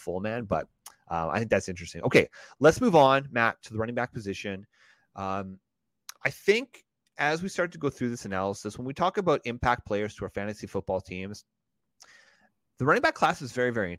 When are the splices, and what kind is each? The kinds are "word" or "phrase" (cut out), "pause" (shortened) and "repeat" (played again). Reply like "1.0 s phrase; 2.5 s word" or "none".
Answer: none